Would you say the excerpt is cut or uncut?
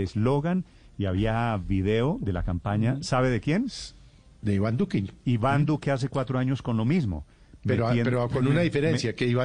uncut